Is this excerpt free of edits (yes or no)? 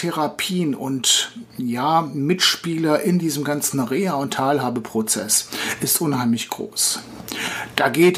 yes